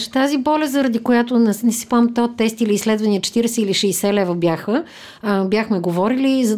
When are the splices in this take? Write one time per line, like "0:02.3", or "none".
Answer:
none